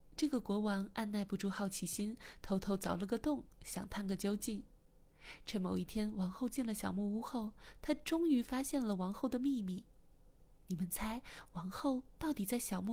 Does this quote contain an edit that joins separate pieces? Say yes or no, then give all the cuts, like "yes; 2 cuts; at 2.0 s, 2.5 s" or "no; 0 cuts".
no; 0 cuts